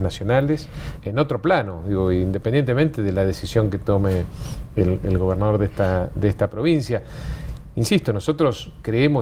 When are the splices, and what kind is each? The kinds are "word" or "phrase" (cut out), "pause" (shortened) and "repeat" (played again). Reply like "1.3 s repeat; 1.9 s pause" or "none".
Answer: 1.0 s word